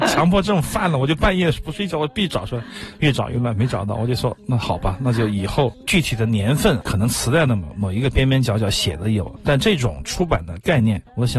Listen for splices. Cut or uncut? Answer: uncut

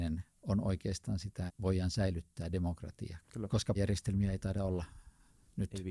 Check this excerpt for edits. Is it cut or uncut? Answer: cut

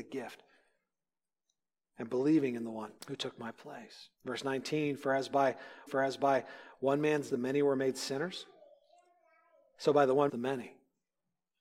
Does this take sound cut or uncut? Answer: cut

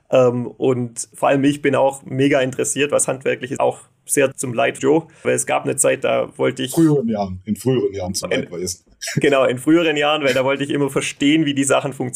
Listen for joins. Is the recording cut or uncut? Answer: cut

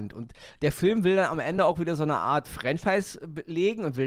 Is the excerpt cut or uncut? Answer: uncut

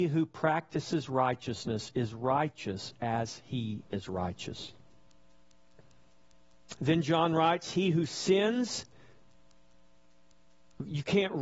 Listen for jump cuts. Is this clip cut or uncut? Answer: cut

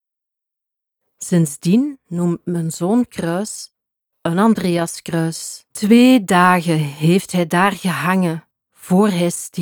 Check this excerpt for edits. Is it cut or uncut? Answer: cut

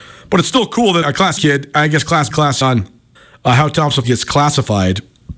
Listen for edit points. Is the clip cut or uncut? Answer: cut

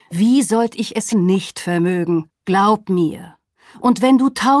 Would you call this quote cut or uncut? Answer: cut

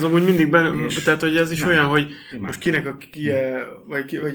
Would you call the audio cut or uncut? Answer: uncut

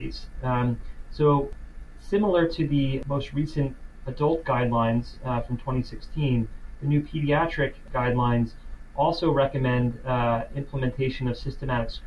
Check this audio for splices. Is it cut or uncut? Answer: uncut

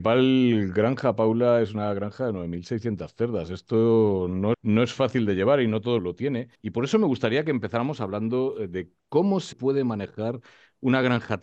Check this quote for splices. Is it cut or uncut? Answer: cut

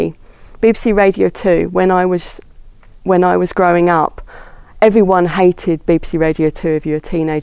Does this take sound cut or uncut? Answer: uncut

